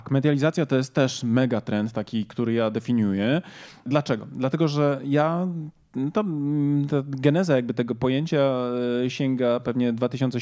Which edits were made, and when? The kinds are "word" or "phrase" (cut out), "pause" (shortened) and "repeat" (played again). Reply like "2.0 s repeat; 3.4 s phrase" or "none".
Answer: none